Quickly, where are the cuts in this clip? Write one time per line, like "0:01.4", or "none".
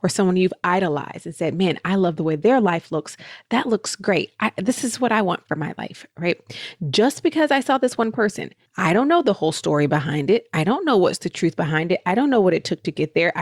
0:08.7